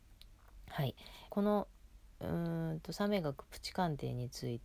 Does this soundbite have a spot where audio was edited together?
yes; 1 cut; at 1.3 s

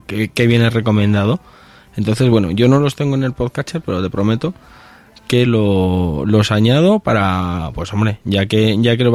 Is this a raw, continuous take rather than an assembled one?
yes; 0 cuts

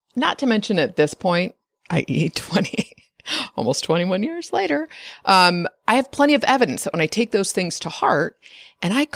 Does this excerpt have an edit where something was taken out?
no; 0 cuts

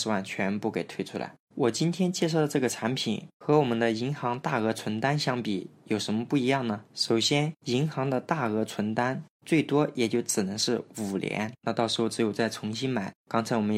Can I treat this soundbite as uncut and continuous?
no; 2 cuts; at 6.9 s, 11.6 s

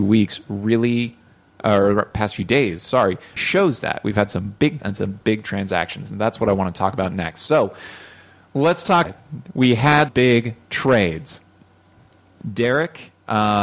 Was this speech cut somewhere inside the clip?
yes; 4 cuts; at 3.4 s, 4.8 s, 9.0 s, 10.1 s

